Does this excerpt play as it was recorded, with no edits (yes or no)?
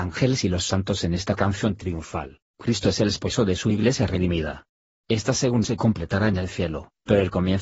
no